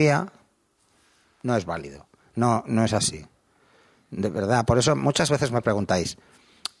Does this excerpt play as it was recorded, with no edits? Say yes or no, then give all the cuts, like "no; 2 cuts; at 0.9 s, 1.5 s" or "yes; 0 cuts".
yes; 0 cuts